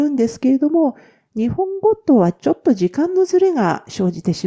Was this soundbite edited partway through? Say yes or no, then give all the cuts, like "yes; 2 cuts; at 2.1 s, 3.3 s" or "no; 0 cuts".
no; 0 cuts